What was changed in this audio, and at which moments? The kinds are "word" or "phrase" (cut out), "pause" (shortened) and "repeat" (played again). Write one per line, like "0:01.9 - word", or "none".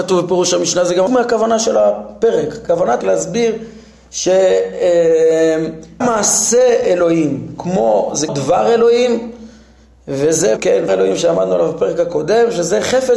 0:01.1 - word
0:03.0 - word
0:06.0 - word
0:08.3 - word
0:10.6 - word
0:10.9 - word